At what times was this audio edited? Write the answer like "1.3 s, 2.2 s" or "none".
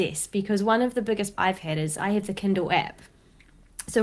1.3 s